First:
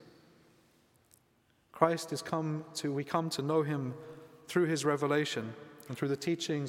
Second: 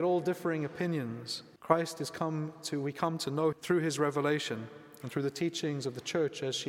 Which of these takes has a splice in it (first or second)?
second